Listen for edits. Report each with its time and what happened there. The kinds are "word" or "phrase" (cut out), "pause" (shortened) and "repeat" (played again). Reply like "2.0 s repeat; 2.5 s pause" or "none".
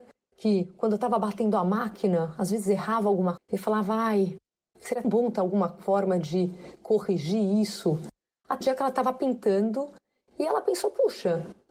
3.4 s word; 5.0 s word; 8.6 s word